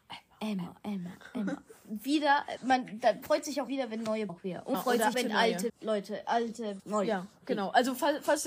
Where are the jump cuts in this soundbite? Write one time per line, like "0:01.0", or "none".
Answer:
0:02.6
0:03.2
0:03.7
0:04.3
0:04.7
0:05.1
0:05.7
0:06.8